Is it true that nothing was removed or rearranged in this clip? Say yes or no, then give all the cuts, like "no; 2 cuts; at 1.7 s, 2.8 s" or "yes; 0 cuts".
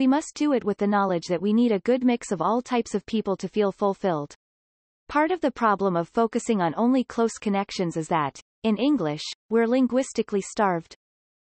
yes; 0 cuts